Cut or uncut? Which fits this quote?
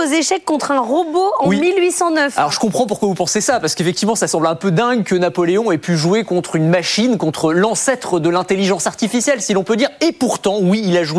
uncut